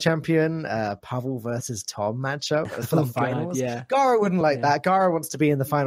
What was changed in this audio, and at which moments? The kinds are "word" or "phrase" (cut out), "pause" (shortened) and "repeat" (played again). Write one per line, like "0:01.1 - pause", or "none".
none